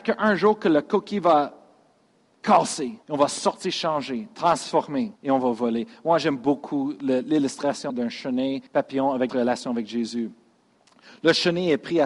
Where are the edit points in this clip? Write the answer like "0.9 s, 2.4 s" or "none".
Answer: 3.0 s, 5.2 s, 7.9 s, 8.7 s, 9.3 s